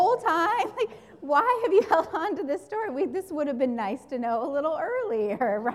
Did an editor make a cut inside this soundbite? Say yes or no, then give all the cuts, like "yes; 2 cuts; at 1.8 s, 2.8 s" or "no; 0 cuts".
no; 0 cuts